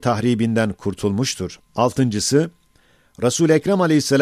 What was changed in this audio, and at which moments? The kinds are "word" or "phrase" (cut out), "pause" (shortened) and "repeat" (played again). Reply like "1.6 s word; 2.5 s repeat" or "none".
1.7 s pause